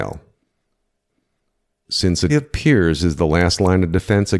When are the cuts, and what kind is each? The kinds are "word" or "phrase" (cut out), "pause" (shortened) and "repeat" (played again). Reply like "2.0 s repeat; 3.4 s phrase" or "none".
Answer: 2.3 s word